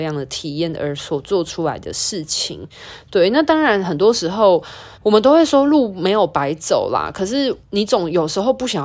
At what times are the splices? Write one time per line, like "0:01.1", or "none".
0:04.9
0:07.6